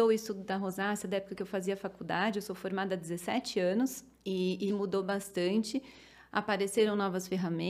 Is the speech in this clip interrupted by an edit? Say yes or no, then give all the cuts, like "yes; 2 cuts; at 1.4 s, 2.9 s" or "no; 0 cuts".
yes; 2 cuts; at 4.1 s, 4.7 s